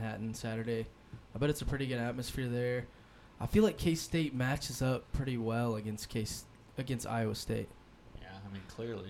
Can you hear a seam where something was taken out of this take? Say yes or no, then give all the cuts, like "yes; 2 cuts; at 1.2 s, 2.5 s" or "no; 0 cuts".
no; 0 cuts